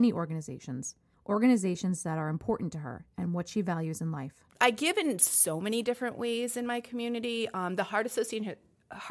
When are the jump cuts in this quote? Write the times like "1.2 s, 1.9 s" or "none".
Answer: 1.1 s, 4.5 s